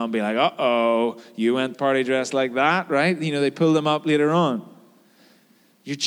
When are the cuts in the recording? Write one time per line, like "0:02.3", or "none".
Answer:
0:01.7